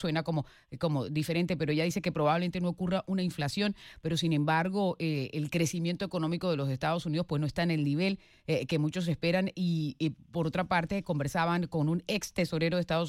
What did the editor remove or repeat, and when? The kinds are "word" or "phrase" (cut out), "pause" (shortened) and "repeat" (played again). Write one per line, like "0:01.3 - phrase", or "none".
none